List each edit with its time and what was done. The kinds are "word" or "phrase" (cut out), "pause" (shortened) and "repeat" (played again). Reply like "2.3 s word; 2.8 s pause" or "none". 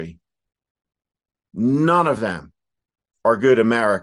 none